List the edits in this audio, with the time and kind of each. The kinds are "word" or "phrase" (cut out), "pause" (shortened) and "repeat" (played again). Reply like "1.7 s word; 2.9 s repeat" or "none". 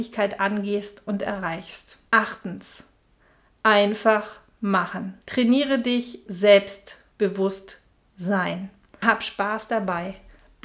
2.1 s pause; 5.2 s pause; 6.3 s word; 9.0 s word